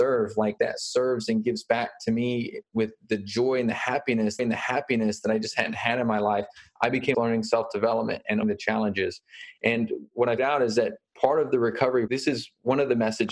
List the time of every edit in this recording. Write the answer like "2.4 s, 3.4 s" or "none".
4.4 s, 7.1 s, 8.4 s, 10.4 s, 12.1 s